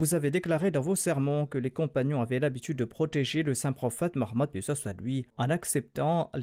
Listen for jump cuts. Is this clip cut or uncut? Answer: cut